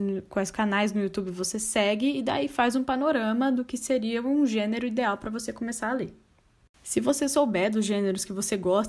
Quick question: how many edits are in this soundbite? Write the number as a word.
zero